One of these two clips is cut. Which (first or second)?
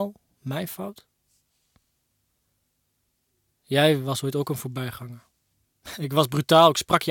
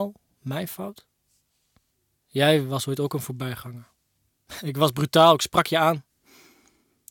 second